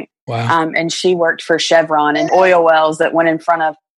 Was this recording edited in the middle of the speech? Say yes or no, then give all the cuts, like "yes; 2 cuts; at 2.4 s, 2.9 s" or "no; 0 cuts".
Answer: yes; 1 cut; at 2.3 s